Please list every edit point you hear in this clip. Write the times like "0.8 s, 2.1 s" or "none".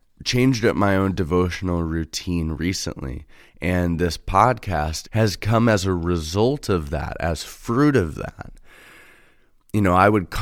none

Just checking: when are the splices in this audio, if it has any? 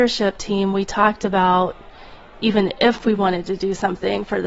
none

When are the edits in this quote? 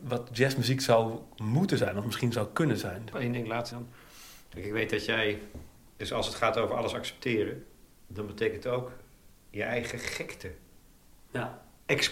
3.7 s

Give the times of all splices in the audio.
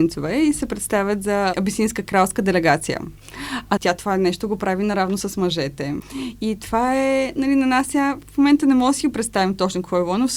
none

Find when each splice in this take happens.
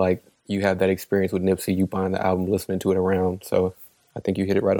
none

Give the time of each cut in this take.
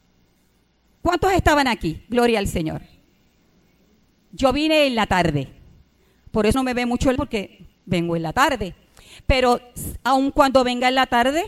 6.5 s, 7.2 s

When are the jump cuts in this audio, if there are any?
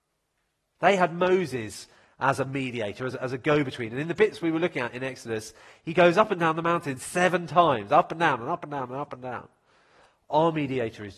none

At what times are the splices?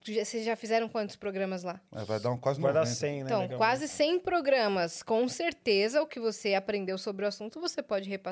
1.9 s

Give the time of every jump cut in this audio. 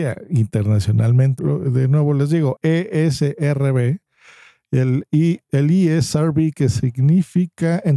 1.4 s, 2.6 s, 5.4 s

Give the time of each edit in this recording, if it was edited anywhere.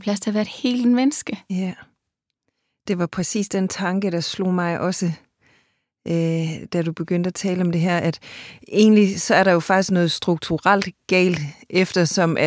none

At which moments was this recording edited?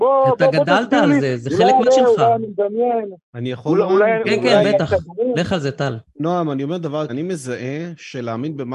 1.9 s, 4.2 s, 7.1 s

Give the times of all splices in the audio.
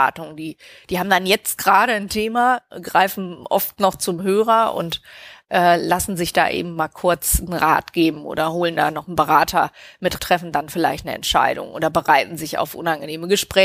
10.2 s

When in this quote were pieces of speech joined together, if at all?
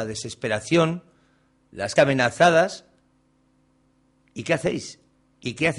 2.0 s

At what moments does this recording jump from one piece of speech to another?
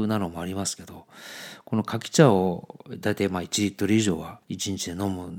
4.4 s

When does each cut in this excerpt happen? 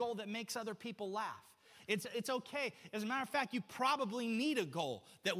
none

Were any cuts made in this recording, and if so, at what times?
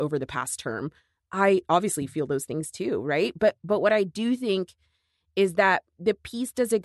none

